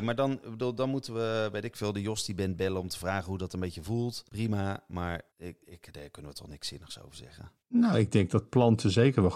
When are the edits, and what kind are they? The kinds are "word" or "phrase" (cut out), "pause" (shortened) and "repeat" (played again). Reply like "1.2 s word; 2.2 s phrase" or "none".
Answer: 4.3 s pause; 5.3 s pause; 7.6 s pause